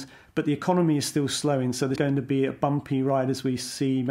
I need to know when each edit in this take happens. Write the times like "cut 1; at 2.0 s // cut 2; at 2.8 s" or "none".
cut 1; at 2.0 s